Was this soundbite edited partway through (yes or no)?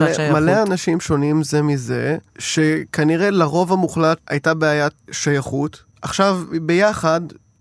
yes